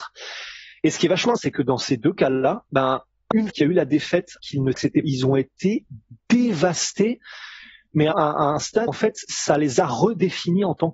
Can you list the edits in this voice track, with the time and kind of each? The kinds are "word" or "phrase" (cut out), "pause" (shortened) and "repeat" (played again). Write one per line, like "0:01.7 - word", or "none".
0:01.4 - word
0:02.7 - pause
0:03.5 - word
0:04.4 - word
0:04.7 - phrase
0:05.0 - word
0:08.1 - word
0:08.9 - word